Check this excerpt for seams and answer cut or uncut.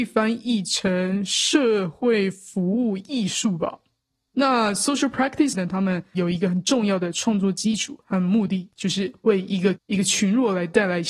cut